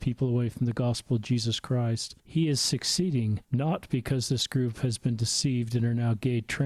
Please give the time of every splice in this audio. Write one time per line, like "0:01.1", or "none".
0:02.2
0:03.4

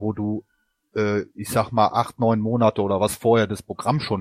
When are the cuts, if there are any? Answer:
none

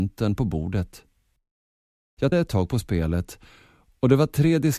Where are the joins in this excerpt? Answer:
0:02.3

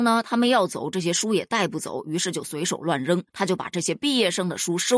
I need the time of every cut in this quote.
0:03.3

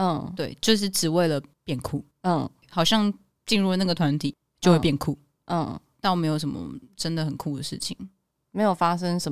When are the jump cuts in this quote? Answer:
none

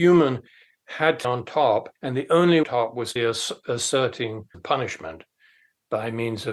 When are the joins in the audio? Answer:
0:01.2
0:02.0
0:02.6
0:03.2
0:04.5

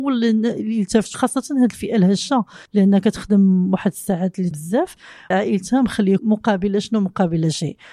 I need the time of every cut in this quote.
0:01.1
0:02.7
0:04.5
0:05.3
0:06.2

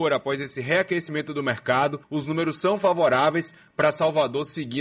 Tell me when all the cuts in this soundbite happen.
0:02.0

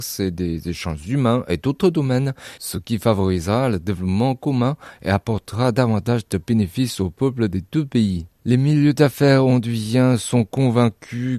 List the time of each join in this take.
0:08.4

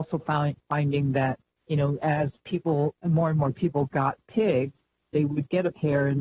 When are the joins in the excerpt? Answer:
none

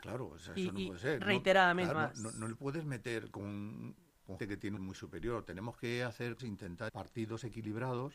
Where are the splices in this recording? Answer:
0:01.9
0:03.3
0:04.4
0:04.8
0:06.4
0:06.9

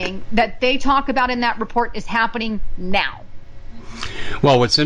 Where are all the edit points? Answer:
none

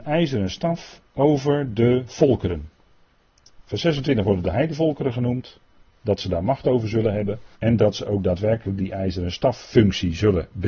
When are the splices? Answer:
0:07.5

